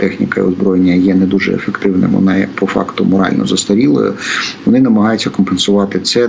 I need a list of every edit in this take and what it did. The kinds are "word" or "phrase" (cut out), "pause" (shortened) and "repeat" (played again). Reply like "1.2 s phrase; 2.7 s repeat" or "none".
none